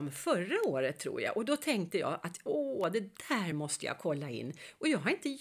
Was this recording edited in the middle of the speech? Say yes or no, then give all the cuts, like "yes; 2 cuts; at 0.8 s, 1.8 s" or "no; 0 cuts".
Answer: no; 0 cuts